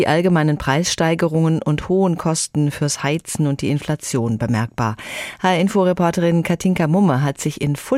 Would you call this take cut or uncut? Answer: uncut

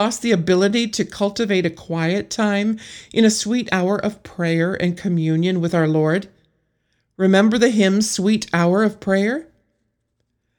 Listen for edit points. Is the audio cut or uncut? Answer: uncut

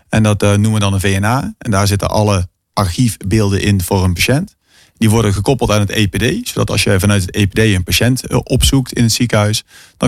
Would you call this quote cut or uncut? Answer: uncut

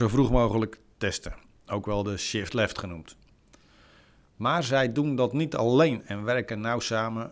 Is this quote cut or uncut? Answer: uncut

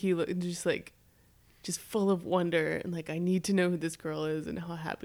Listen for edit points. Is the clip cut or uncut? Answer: uncut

